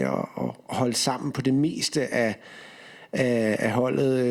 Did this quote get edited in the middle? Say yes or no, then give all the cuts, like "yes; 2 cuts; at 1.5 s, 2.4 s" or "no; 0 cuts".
no; 0 cuts